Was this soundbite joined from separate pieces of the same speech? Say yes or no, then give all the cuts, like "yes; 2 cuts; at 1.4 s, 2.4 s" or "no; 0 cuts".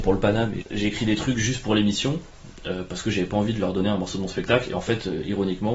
no; 0 cuts